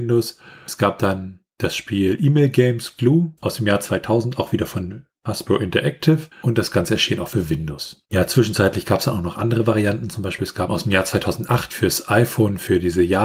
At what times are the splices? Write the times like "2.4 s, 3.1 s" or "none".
3.4 s, 6.3 s, 8.0 s, 10.7 s